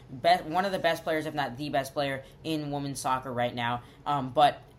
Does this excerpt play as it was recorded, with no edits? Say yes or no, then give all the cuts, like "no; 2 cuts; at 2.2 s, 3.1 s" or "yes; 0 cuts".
yes; 0 cuts